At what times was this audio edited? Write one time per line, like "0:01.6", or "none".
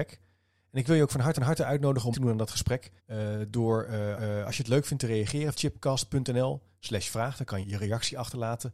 0:01.4
0:02.1
0:03.0
0:04.2
0:05.5
0:07.6